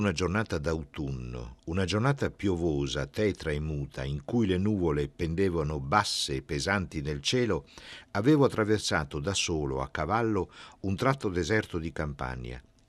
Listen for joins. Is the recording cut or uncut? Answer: uncut